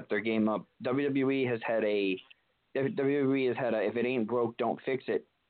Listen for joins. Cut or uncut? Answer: uncut